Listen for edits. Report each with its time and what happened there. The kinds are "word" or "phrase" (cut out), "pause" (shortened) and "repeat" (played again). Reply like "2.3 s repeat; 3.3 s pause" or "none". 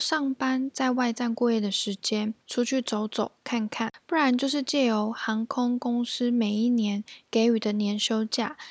2.4 s pause